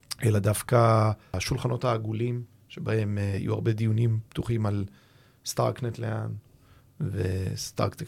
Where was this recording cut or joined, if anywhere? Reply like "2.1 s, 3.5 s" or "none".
none